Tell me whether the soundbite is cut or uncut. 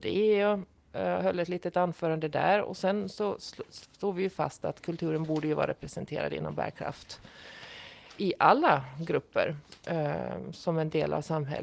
uncut